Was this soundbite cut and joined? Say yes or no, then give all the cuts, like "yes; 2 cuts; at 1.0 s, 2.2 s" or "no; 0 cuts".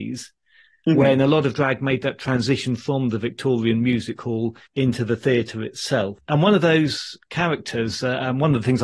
yes; 1 cut; at 4.7 s